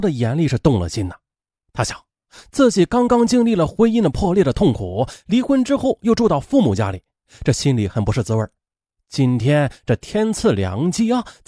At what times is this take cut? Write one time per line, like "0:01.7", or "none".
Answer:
none